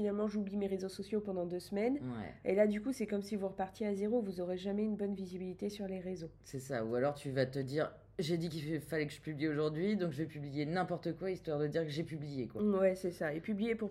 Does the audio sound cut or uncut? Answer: uncut